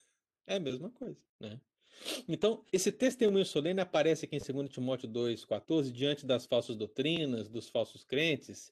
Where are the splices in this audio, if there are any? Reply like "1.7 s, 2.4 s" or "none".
1.3 s, 2.7 s